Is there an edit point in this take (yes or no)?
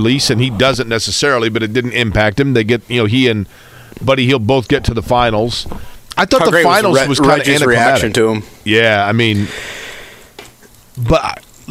no